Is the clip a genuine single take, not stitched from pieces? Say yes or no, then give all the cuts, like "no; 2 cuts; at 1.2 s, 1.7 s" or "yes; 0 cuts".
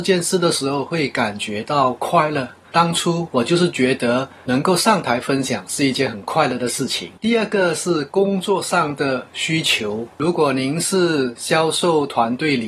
no; 2 cuts; at 7.2 s, 10.1 s